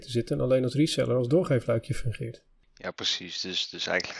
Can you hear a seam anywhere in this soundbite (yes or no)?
no